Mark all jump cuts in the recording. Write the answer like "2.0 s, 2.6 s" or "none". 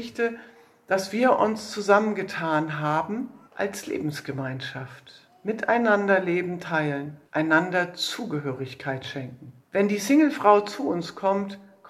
3.4 s, 7.3 s, 9.6 s

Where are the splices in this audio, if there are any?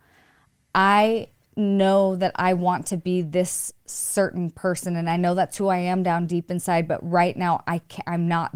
none

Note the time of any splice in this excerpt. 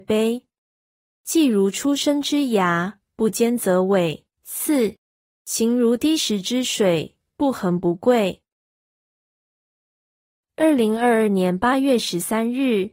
1.1 s, 4.3 s

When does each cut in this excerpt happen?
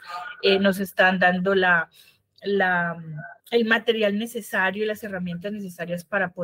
3.4 s

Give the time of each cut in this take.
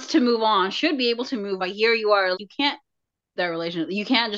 1.6 s, 2.3 s, 3.4 s

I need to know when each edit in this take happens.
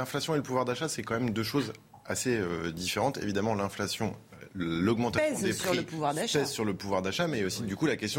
none

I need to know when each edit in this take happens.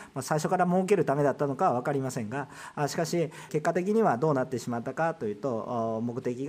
3.5 s

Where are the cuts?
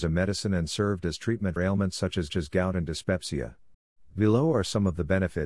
1.6 s, 2.3 s, 3.7 s

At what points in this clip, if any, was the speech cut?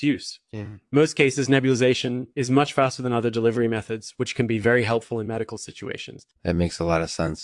2.3 s, 6.4 s

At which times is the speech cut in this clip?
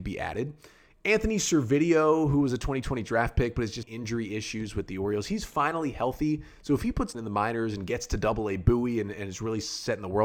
3.8 s, 7.1 s

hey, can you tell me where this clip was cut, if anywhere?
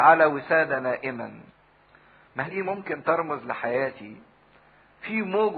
2.5 s

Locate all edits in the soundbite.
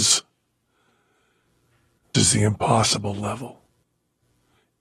2.1 s

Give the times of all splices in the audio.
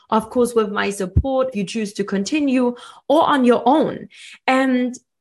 1.5 s

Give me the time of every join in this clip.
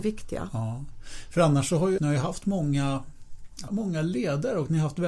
2.0 s, 3.7 s

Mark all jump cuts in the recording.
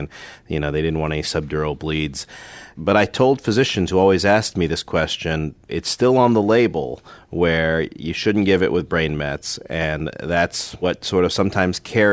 5.6 s

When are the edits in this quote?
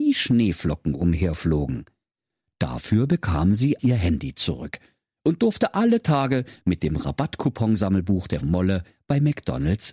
3.8 s, 8.4 s

